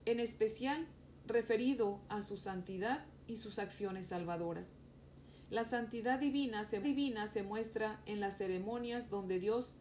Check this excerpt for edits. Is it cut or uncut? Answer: cut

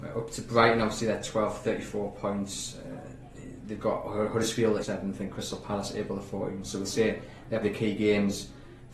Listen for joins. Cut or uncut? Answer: cut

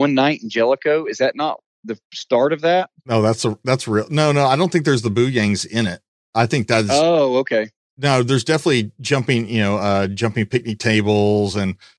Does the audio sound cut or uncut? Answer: uncut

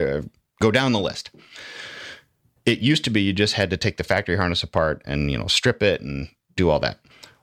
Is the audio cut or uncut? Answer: uncut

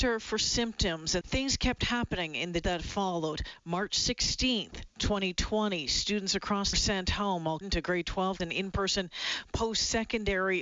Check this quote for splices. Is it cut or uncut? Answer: cut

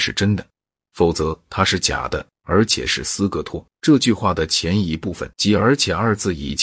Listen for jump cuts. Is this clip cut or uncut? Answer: cut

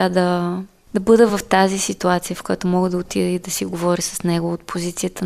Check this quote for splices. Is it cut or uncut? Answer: uncut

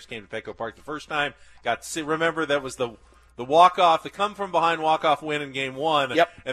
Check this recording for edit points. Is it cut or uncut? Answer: uncut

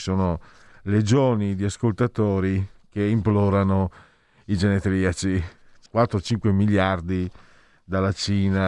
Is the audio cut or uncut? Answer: cut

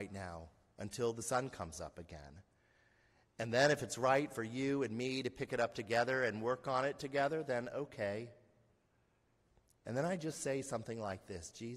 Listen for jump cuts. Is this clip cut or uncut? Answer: uncut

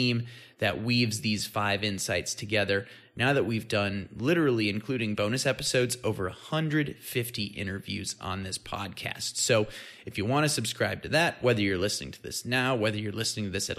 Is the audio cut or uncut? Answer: uncut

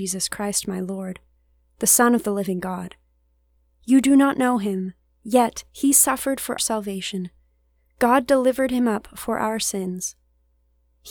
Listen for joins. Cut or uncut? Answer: cut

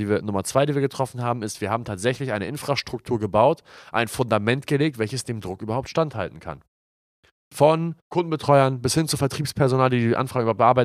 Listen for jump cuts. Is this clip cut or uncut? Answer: cut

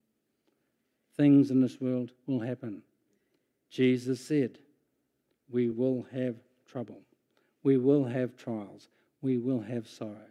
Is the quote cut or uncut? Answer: uncut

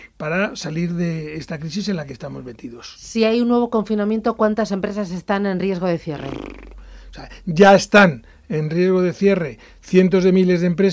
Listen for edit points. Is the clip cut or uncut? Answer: uncut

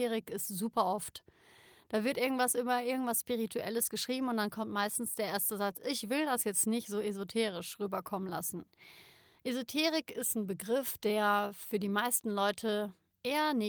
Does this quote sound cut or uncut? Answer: uncut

